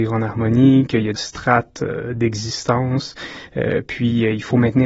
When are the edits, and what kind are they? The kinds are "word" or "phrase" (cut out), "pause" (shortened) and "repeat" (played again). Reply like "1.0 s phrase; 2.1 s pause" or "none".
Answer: 1.2 s word